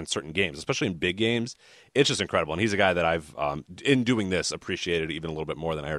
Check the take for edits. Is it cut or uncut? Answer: uncut